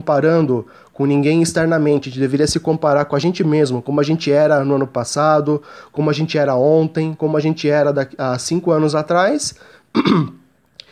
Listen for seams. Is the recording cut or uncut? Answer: uncut